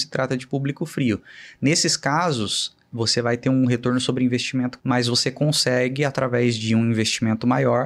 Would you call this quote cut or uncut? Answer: cut